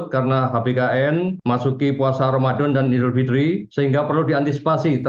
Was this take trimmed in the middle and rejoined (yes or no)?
no